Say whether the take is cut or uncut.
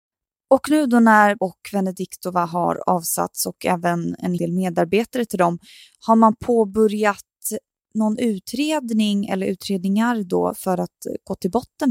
cut